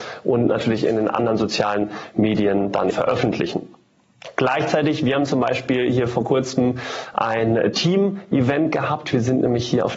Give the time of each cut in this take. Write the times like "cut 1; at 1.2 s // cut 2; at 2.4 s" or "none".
cut 1; at 2.9 s